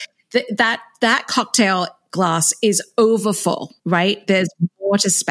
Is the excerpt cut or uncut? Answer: cut